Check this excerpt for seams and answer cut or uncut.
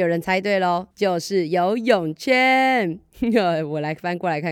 cut